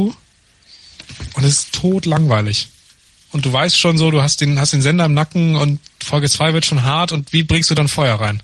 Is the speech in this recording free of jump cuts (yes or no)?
yes